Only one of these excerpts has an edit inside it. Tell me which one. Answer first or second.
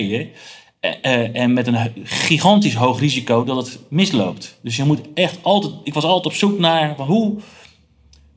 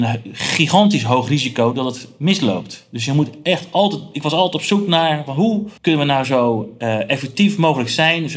second